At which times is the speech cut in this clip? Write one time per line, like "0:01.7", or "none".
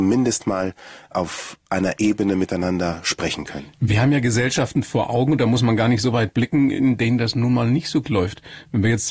0:08.0